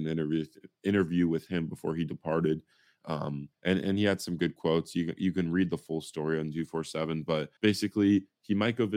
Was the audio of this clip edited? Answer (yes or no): yes